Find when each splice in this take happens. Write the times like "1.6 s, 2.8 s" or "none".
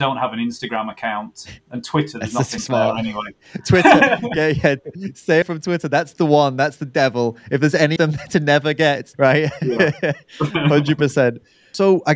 2.6 s, 5.4 s, 8.0 s, 9.1 s